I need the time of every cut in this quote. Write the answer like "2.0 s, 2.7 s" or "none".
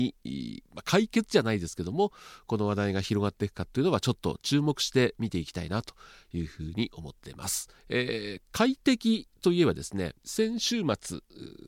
7.2 s, 7.8 s, 10.2 s